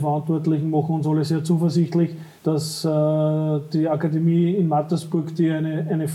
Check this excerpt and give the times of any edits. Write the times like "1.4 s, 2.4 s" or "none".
2.4 s